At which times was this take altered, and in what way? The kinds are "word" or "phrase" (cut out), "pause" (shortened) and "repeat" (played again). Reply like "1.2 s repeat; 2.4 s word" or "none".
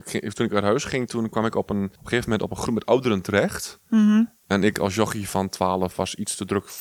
2.0 s pause